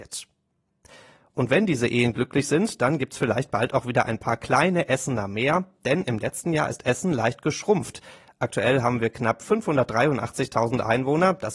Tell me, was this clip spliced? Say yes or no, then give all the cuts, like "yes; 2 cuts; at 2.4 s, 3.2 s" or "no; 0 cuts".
no; 0 cuts